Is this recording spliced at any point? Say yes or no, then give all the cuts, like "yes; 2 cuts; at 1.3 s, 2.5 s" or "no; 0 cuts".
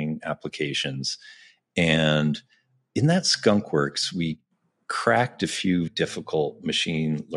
yes; 1 cut; at 5.9 s